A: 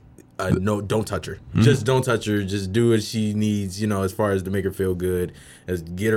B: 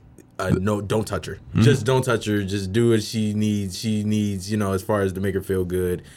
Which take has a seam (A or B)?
B